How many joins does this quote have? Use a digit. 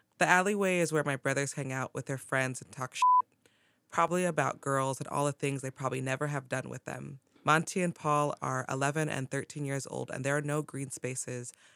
1